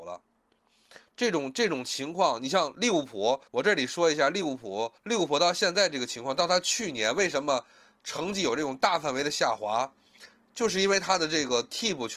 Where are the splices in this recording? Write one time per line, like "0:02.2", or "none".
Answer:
0:03.5
0:05.0